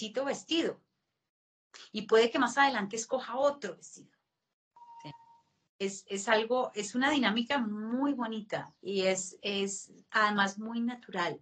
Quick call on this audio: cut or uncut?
cut